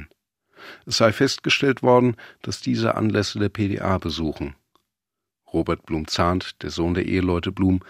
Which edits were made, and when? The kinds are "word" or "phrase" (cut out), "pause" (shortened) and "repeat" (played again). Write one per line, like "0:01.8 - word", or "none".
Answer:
none